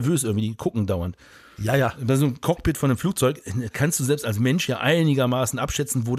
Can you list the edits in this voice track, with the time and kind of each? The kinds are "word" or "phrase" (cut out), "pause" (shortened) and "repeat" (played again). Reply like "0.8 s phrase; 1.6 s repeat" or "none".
none